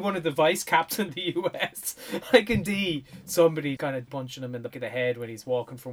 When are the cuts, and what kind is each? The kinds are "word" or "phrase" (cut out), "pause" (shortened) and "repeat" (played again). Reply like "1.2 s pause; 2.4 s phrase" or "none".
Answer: 1.1 s word; 2.7 s word; 3.8 s word; 4.1 s word; 4.7 s word